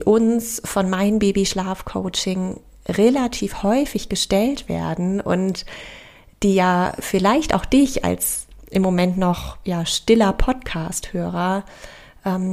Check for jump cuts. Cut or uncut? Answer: uncut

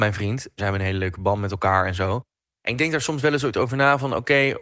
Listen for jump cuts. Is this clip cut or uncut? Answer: uncut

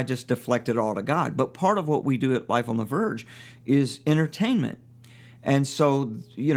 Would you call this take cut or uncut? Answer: uncut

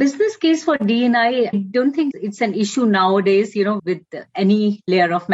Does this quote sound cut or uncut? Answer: cut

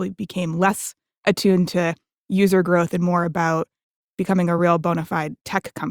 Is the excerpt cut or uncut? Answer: uncut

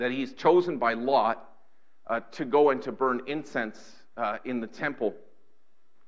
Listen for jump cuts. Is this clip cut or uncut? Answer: uncut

